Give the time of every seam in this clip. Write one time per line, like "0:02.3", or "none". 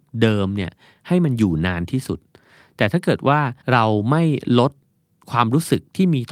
0:03.6